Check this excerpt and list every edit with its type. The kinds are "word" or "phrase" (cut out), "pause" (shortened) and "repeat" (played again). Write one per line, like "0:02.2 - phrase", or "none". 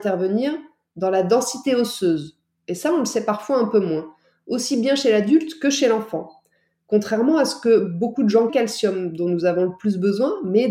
0:08.5 - phrase